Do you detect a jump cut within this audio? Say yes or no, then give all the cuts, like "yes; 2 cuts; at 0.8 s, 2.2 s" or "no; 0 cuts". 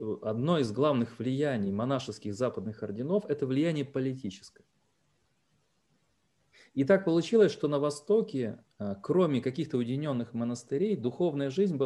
no; 0 cuts